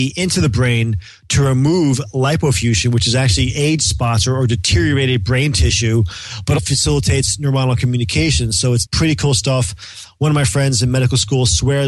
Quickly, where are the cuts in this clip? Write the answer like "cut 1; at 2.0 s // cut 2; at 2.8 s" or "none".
cut 1; at 6.6 s // cut 2; at 8.8 s